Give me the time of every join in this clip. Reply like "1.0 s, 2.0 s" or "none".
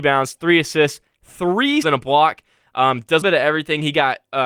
1.8 s, 3.2 s